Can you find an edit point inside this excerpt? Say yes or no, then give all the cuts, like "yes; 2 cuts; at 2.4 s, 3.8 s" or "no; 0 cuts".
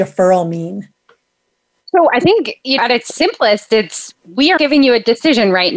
yes; 2 cuts; at 2.8 s, 4.6 s